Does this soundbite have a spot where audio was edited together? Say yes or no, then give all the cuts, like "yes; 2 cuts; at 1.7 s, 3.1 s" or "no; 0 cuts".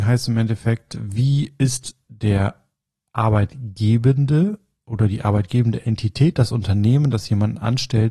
no; 0 cuts